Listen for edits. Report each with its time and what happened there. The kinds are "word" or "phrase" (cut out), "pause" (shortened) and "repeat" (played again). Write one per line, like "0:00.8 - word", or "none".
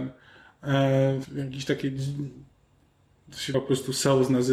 0:01.2 - word
0:03.5 - word